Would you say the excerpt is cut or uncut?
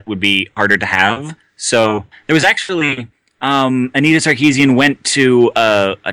uncut